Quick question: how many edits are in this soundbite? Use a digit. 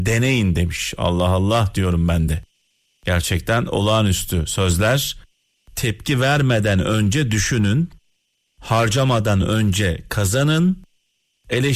0